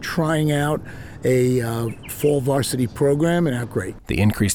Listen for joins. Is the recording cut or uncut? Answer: cut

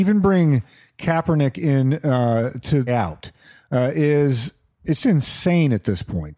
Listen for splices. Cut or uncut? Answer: cut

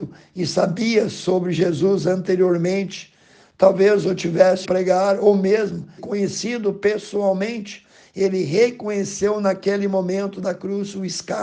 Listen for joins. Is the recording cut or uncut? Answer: cut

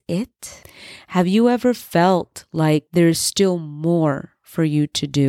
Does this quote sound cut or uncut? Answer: uncut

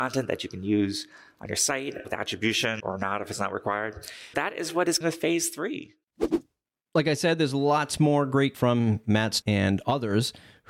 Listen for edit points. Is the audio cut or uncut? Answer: cut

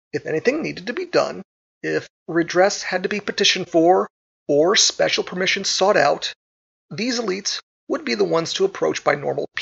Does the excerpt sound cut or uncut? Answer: uncut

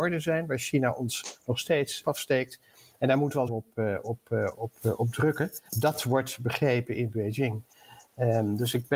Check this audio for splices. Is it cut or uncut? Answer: cut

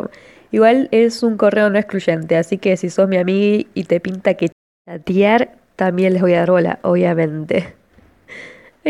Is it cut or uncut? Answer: uncut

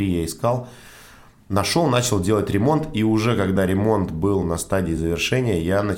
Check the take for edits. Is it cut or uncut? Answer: uncut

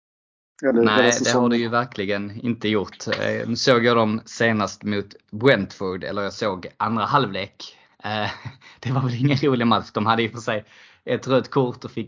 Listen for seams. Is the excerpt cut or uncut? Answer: uncut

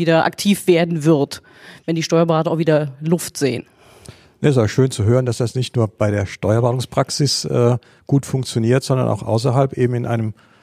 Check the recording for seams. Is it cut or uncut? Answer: uncut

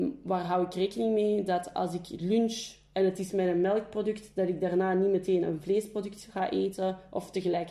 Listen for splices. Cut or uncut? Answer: uncut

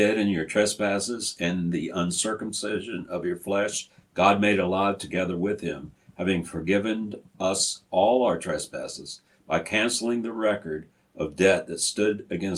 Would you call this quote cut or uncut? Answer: cut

